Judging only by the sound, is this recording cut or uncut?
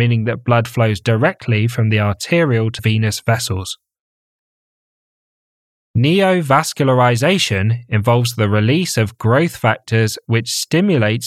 cut